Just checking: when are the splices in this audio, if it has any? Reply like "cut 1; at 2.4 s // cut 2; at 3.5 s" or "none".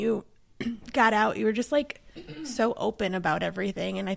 none